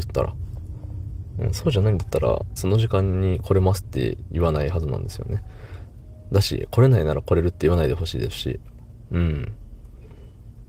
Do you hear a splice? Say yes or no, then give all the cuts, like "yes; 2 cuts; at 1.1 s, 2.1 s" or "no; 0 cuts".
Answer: yes; 1 cut; at 2.6 s